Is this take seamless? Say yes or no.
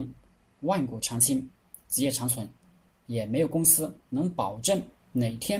yes